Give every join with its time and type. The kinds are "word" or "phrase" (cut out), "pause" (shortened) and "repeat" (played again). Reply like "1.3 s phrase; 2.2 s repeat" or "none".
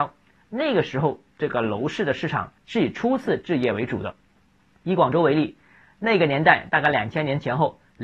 2.6 s pause